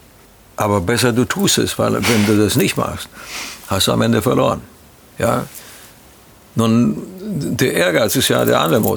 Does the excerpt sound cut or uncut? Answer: uncut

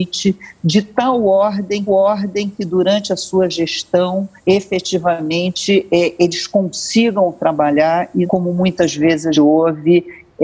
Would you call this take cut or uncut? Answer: cut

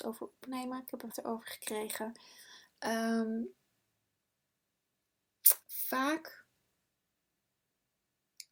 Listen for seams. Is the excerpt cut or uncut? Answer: cut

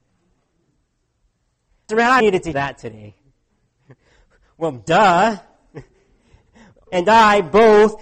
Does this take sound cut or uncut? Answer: cut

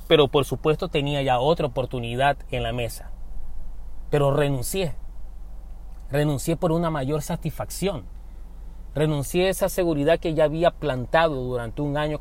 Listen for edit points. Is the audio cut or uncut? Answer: uncut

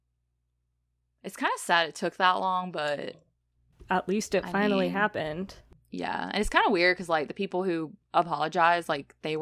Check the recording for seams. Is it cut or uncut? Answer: uncut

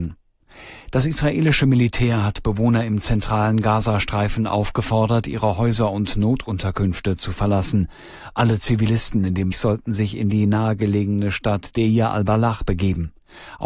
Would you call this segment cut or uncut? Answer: cut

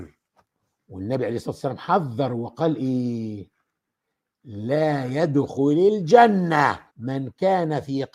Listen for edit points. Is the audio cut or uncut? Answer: cut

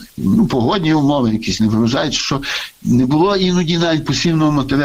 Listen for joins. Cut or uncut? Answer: uncut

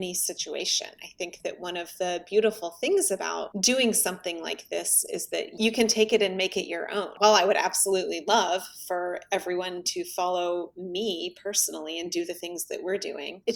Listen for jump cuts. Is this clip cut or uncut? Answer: uncut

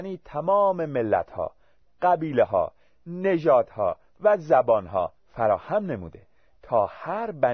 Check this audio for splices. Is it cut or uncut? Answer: uncut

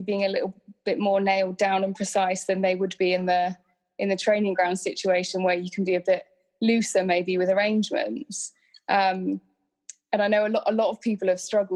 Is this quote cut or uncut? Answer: uncut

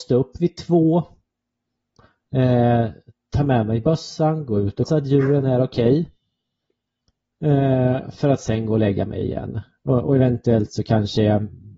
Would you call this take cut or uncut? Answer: cut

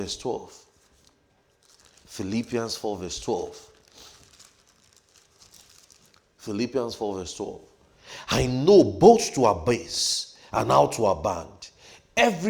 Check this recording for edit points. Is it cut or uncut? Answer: uncut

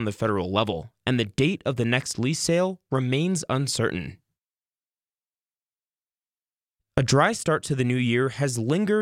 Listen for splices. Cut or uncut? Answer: uncut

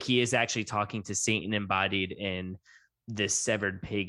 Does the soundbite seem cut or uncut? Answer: uncut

